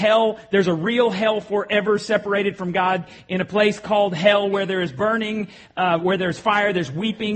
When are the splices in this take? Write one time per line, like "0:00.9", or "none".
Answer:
none